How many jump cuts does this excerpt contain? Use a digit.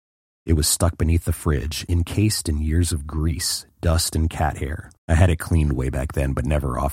1